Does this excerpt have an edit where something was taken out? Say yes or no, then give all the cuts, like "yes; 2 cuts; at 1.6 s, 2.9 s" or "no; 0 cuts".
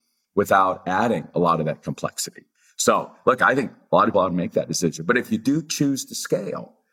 yes; 1 cut; at 4.1 s